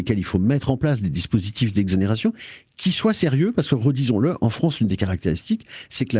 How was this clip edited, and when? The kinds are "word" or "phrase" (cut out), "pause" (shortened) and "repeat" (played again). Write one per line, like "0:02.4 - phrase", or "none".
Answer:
none